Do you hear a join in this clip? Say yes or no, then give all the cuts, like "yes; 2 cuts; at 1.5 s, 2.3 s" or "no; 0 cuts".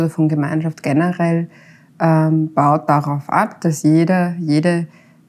no; 0 cuts